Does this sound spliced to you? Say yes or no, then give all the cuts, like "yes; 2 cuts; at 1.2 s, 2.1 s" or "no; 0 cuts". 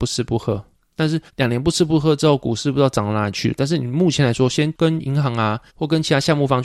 yes; 2 cuts; at 1.3 s, 5.7 s